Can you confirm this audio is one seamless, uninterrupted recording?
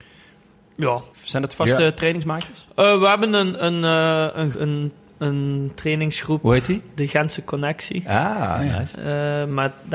no; 2 cuts; at 1.1 s, 4.5 s

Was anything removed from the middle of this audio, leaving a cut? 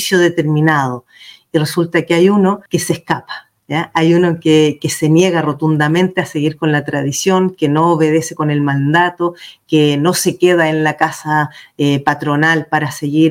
yes; 1 cut; at 2.7 s

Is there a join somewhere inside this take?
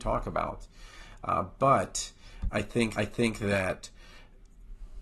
yes; 2 cuts; at 2.5 s, 3.0 s

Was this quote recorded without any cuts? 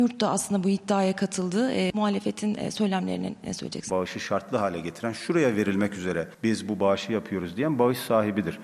no; 1 cut; at 6.3 s

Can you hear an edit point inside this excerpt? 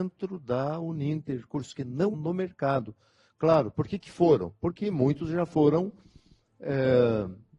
yes; 1 cut; at 2.1 s

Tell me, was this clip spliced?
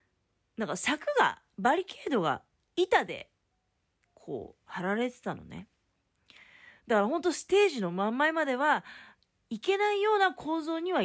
no; 0 cuts

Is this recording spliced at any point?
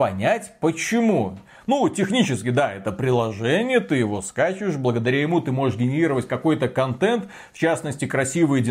no; 0 cuts

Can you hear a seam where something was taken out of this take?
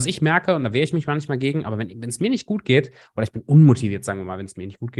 no; 0 cuts

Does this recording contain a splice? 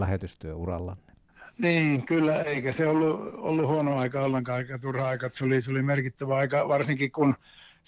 yes; 1 cut; at 1.5 s

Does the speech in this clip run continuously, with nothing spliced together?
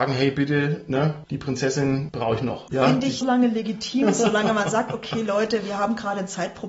no; 1 cut; at 3.2 s

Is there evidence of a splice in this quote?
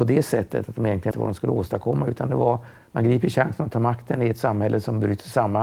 yes; 1 cut; at 1.1 s

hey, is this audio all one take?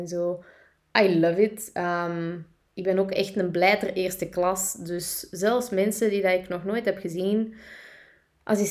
yes; 0 cuts

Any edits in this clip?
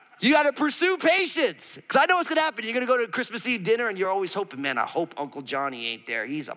no; 0 cuts

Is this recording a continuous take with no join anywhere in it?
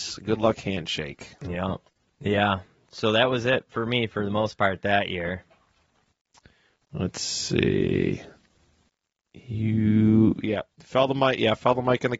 no; 1 cut; at 10.7 s

